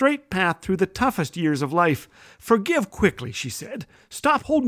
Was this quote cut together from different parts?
no; 0 cuts

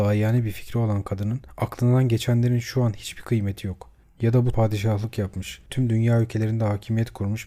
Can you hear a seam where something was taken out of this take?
yes; 2 cuts; at 4.5 s, 5.7 s

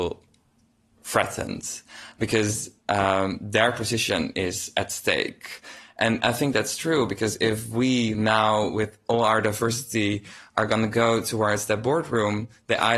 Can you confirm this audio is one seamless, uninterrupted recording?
yes; 0 cuts

